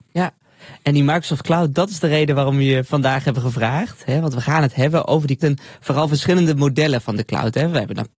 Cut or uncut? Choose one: cut